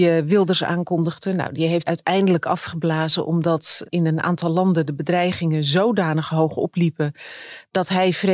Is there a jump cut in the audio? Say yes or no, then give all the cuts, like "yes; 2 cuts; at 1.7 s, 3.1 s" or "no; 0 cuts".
yes; 2 cuts; at 1.8 s, 3.8 s